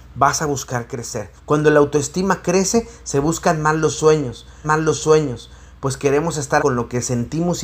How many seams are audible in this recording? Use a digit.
3